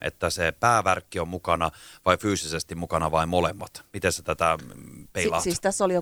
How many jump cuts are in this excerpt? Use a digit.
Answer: 0